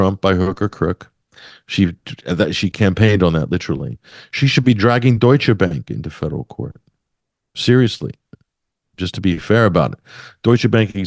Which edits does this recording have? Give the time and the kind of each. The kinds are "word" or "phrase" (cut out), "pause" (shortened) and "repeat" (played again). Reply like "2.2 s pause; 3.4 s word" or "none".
none